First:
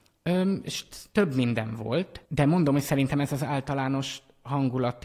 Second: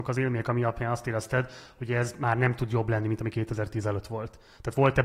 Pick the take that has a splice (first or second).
first